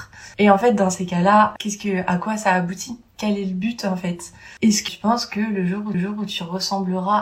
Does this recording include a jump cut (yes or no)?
yes